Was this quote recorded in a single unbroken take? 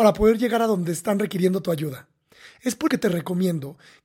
no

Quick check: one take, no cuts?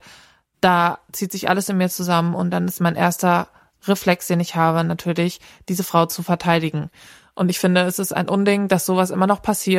yes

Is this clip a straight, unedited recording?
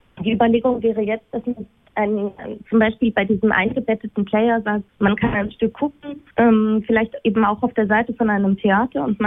no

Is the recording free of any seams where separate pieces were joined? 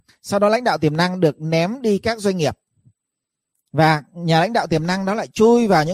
yes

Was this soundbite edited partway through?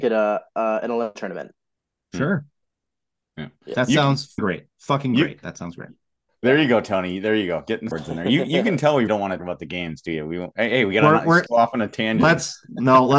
yes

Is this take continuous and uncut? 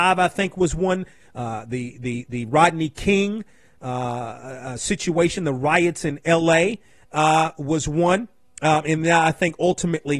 yes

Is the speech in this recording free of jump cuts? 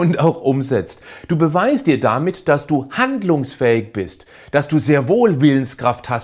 yes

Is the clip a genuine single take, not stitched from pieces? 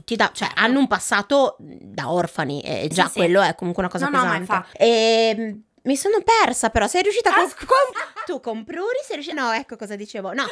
no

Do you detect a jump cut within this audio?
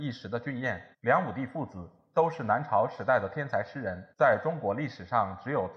yes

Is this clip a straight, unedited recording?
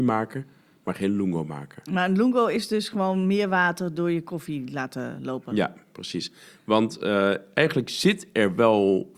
yes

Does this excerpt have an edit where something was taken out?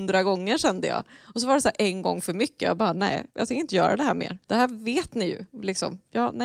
yes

